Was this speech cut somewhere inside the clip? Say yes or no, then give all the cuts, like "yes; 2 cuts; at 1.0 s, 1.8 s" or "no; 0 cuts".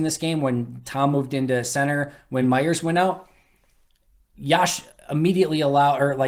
no; 0 cuts